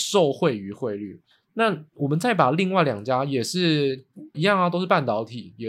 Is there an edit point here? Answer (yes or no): yes